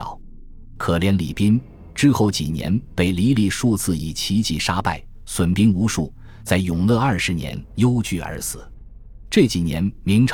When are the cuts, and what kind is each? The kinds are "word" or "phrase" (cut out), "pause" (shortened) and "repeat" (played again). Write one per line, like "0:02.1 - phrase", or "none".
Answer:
none